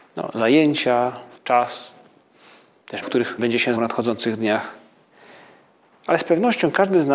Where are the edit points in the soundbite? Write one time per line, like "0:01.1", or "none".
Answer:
0:01.4
0:03.0
0:03.4
0:03.8